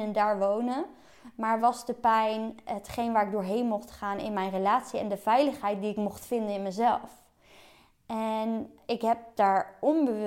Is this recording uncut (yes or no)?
yes